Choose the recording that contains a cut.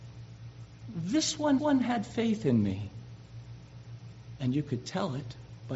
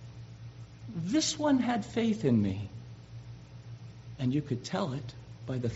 first; 1 cut; at 1.6 s

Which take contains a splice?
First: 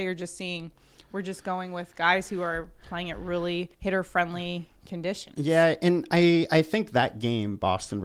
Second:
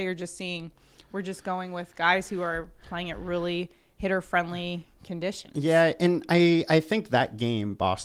first; 1 cut; at 3.7 s

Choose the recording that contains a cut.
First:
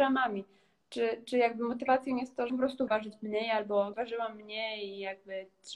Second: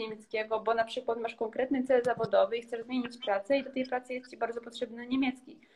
first; 3 cuts; at 2.5 s, 2.9 s, 3.9 s

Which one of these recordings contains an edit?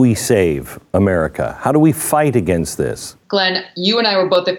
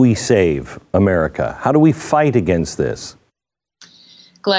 first; 1 cut; at 3.2 s

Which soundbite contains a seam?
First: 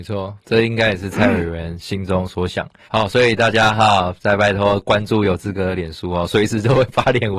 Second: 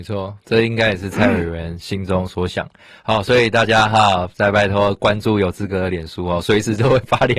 first; 1 cut; at 2.8 s

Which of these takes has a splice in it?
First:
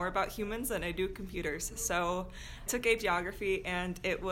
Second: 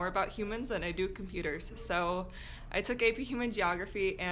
first; 2 cuts; at 2.7 s, 3.0 s

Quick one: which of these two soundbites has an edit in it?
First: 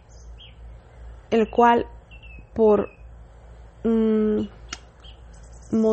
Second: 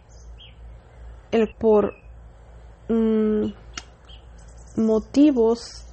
second; 1 cut; at 1.5 s

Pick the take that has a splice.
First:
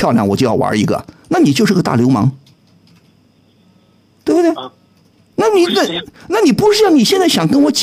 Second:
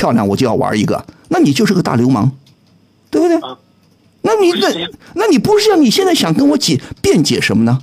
second; 1 cut; at 2.8 s

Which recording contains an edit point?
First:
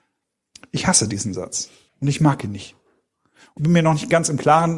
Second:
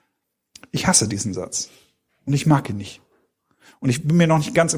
first; 2 cuts; at 1.9 s, 3.6 s

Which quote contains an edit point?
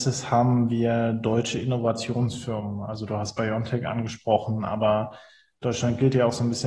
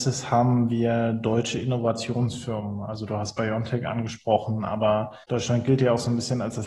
second; 1 cut; at 5.2 s

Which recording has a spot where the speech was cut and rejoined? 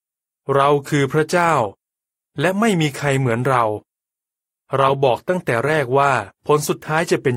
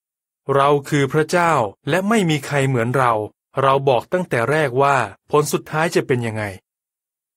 second; 2 cuts; at 1.8 s, 3.5 s

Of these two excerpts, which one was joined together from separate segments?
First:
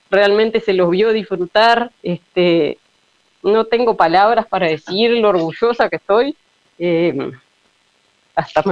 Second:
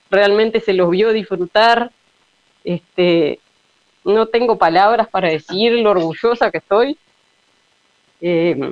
first; 2 cuts; at 2.0 s, 6.5 s

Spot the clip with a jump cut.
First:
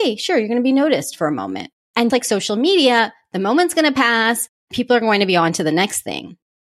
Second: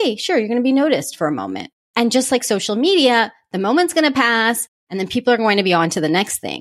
first; 2 cuts; at 2.1 s, 4.7 s

